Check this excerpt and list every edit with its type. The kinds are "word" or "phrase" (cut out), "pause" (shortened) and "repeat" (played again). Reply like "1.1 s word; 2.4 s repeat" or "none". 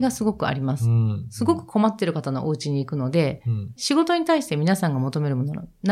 3.8 s word